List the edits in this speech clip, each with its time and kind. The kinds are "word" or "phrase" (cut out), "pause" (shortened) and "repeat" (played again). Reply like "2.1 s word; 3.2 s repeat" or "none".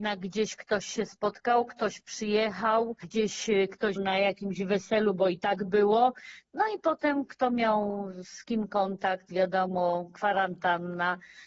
4.0 s word